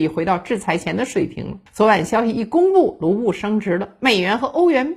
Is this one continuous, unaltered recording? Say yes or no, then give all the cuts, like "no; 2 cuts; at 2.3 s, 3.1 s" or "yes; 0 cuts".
no; 1 cut; at 1.7 s